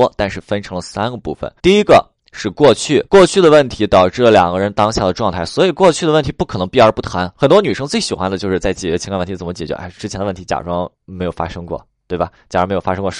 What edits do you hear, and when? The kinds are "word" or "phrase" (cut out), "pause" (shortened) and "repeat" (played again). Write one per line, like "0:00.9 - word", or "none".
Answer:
0:01.6 - pause
0:02.2 - pause
0:03.1 - pause
0:07.4 - pause